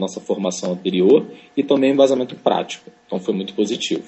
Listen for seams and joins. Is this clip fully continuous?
yes; 0 cuts

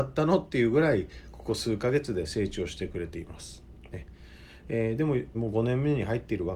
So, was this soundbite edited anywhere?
yes; 1 cut; at 5.3 s

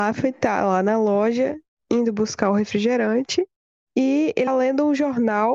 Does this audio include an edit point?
yes; 1 cut; at 4.5 s

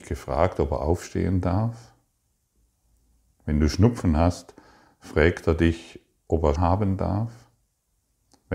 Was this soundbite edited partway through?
yes; 1 cut; at 6.6 s

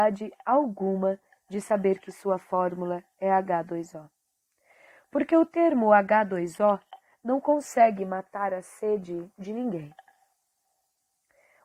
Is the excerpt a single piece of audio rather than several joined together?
yes; 0 cuts

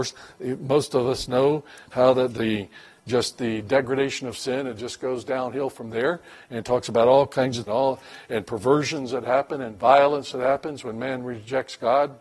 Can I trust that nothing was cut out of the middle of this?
no; 1 cut; at 7.7 s

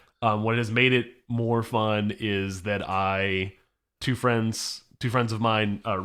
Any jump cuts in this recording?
yes; 1 cut; at 4.0 s

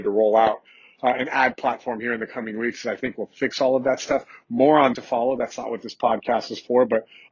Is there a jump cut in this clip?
yes; 1 cut; at 4.9 s

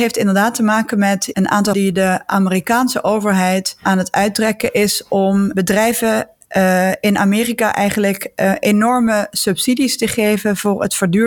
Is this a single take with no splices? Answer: no; 1 cut; at 1.7 s

